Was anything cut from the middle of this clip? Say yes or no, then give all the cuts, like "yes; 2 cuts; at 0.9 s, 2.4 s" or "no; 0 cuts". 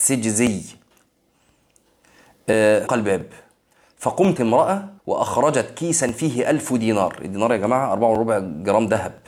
yes; 3 cuts; at 2.9 s, 4.4 s, 5.0 s